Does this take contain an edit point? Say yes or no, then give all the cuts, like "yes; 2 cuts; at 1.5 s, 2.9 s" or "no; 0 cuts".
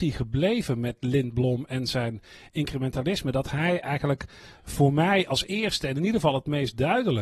no; 0 cuts